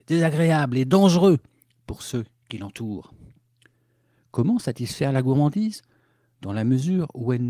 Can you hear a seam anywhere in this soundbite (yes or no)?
no